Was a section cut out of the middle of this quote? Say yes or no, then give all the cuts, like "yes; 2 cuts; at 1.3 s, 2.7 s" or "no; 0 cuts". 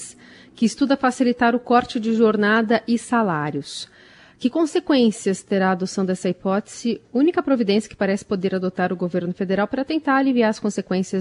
no; 0 cuts